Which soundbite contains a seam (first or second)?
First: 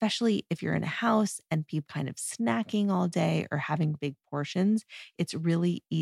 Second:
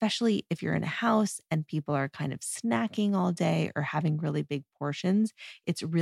first